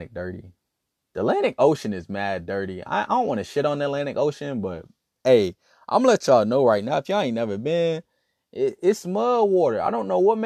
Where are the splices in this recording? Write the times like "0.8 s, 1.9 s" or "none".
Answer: none